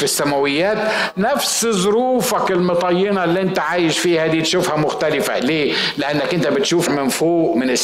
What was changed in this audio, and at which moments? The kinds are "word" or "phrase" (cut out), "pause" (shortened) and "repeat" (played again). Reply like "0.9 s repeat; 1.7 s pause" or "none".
6.9 s word